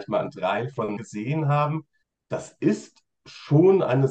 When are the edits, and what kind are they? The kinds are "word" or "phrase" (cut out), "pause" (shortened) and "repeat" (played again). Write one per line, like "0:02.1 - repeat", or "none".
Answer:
0:01.0 - word
0:02.0 - pause